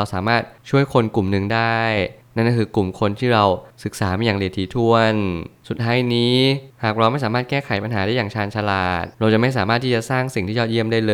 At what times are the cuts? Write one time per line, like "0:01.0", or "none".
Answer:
0:09.1